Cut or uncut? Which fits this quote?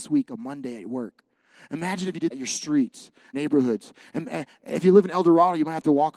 cut